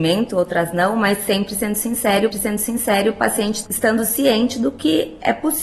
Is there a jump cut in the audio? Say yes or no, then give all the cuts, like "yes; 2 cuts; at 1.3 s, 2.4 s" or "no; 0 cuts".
yes; 2 cuts; at 2.3 s, 3.6 s